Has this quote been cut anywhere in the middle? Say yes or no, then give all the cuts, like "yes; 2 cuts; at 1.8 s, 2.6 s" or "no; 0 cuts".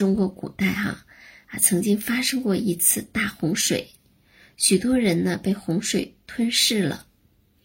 no; 0 cuts